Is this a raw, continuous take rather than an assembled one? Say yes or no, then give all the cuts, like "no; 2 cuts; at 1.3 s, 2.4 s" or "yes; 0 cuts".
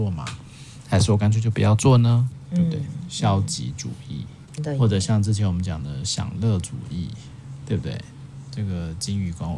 no; 1 cut; at 4.6 s